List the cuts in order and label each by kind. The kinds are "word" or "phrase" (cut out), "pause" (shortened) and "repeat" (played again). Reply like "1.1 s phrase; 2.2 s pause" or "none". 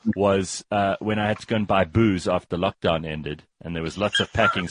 none